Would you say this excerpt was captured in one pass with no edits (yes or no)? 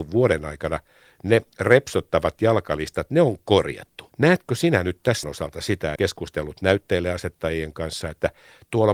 no